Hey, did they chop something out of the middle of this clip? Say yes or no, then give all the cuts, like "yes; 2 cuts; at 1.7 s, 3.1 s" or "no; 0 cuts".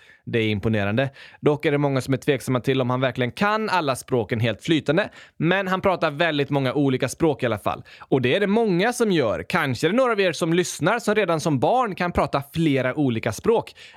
no; 0 cuts